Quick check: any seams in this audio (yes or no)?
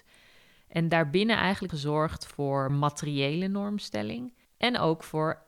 yes